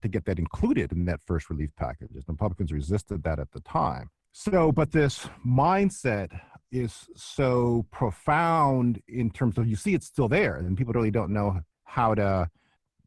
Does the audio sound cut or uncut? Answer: uncut